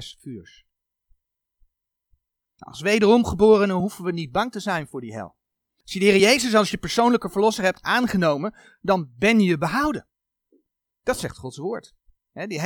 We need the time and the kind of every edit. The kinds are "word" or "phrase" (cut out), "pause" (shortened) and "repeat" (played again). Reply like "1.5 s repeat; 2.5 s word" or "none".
none